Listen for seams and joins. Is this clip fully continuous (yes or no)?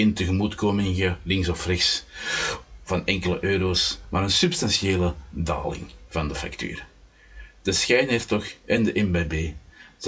yes